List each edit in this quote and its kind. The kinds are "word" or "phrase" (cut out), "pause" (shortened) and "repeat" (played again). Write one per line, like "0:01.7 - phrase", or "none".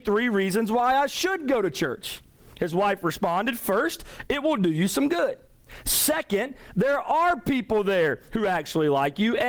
none